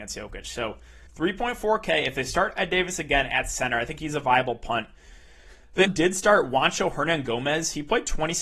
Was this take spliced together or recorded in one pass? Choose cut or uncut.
cut